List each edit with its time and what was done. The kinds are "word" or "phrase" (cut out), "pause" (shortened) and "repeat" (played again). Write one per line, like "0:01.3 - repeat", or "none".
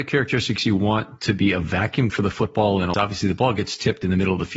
0:02.1 - word
0:02.9 - phrase